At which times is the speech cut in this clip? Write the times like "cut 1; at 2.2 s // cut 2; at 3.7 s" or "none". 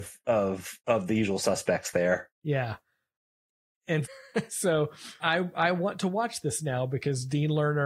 cut 1; at 2.3 s // cut 2; at 4.0 s // cut 3; at 5.2 s